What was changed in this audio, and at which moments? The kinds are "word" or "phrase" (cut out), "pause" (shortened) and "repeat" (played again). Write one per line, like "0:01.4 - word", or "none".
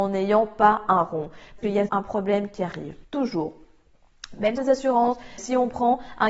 0:01.6 - word
0:01.9 - word
0:03.0 - pause
0:04.6 - phrase
0:05.4 - word